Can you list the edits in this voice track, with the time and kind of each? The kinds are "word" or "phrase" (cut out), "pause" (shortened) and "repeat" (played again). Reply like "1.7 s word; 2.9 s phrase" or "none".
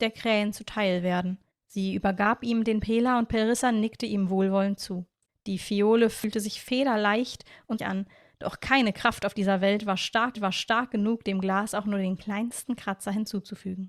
1.5 s pause; 5.3 s pause; 7.8 s word; 10.3 s repeat